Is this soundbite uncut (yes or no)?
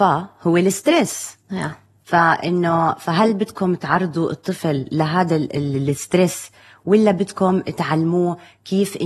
yes